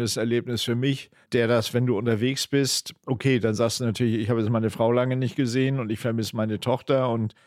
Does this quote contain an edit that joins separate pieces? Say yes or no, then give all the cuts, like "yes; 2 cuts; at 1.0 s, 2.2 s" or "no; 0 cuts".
yes; 1 cut; at 1.2 s